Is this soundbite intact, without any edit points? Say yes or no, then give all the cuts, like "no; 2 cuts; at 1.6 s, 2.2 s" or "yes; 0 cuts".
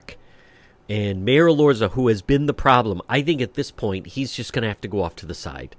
yes; 0 cuts